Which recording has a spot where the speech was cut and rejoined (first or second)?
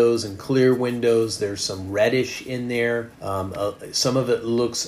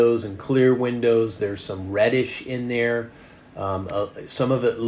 first